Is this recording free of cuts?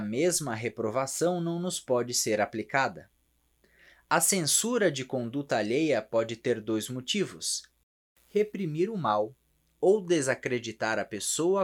yes; 0 cuts

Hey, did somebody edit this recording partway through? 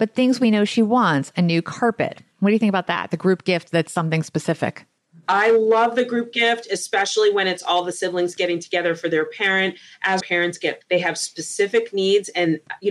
yes; 3 cuts; at 1.3 s, 10.2 s, 10.8 s

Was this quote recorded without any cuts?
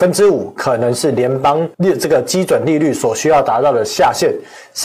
no; 1 cut; at 1.7 s

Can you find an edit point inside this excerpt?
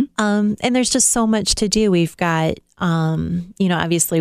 no; 0 cuts

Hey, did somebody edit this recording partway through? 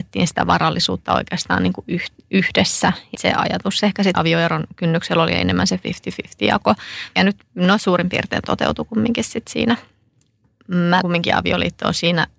yes; 4 cuts; at 3.1 s, 4.1 s, 7.2 s, 11.0 s

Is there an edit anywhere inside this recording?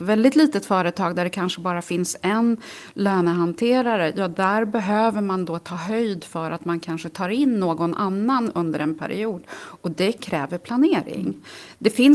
no; 0 cuts

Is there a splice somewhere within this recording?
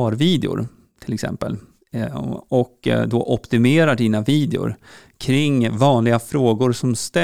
no; 0 cuts

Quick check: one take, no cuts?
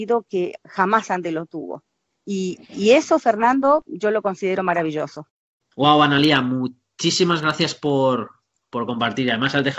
yes; 0 cuts

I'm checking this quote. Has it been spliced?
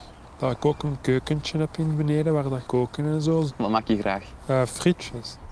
yes; 1 cut; at 2.7 s

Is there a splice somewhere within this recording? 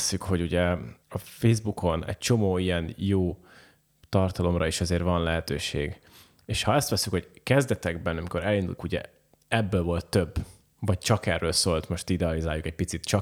yes; 2 cuts; at 1.0 s, 8.8 s

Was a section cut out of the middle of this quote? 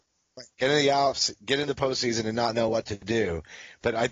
no; 0 cuts

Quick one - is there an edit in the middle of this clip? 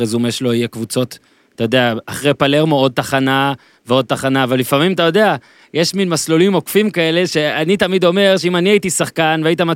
no; 0 cuts

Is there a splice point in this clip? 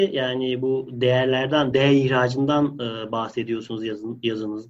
no; 0 cuts

